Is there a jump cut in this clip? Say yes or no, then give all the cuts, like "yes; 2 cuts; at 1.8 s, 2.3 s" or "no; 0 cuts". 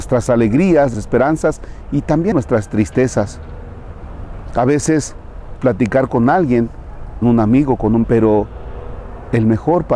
yes; 5 cuts; at 0.9 s, 2.3 s, 5.6 s, 7.2 s, 8.0 s